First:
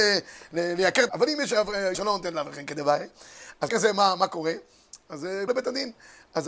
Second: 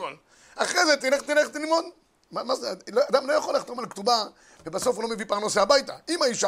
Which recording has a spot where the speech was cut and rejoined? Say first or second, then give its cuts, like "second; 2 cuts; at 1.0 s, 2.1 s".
first; 4 cuts; at 1.1 s, 1.9 s, 3.7 s, 5.5 s